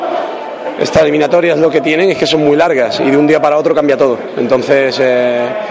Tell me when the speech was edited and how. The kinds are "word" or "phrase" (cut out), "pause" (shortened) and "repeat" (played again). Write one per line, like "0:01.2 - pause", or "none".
none